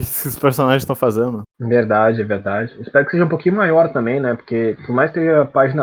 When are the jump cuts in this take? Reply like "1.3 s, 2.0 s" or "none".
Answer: 1.5 s